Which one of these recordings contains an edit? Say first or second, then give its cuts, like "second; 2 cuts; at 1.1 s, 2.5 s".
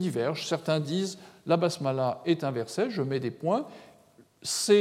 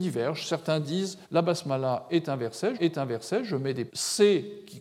second; 3 cuts; at 1.2 s, 2.7 s, 3.9 s